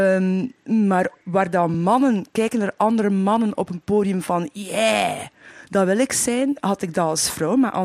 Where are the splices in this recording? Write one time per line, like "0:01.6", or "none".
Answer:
none